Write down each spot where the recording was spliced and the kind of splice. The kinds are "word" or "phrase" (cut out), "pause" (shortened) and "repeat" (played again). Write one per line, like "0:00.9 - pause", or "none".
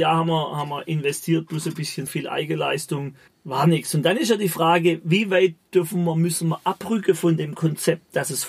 0:02.1 - word

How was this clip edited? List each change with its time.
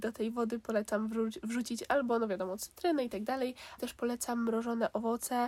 0:03.8 - word

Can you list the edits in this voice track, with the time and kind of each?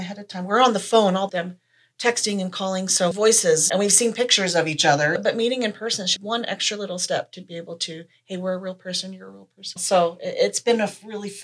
0:01.3 - phrase
0:03.1 - phrase
0:06.2 - word

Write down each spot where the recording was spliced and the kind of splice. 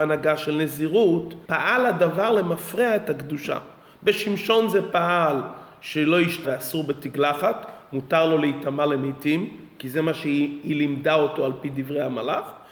0:01.4 - pause
0:06.4 - word

